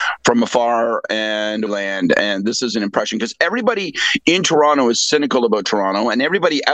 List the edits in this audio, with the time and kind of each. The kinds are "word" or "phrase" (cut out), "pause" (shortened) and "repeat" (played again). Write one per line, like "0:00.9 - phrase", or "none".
0:01.7 - word